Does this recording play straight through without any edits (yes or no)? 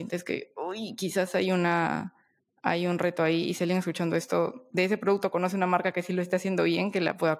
yes